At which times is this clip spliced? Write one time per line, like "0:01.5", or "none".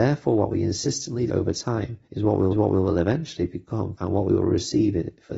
0:01.3
0:02.0
0:02.5
0:04.0